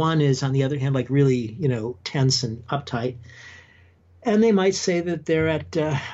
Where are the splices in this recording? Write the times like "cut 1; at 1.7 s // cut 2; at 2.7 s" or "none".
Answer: none

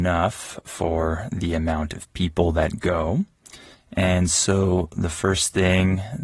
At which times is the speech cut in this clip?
cut 1; at 3.7 s

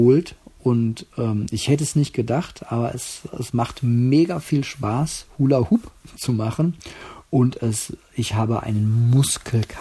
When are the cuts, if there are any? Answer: none

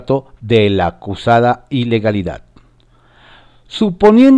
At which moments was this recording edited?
none

